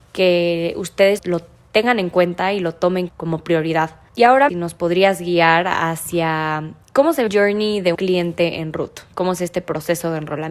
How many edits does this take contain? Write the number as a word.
six